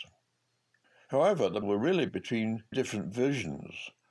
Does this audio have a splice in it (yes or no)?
yes